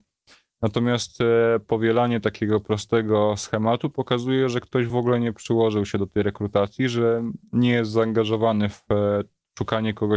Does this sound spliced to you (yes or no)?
no